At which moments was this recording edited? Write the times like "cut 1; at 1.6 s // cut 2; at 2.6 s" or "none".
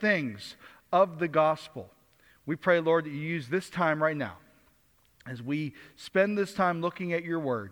none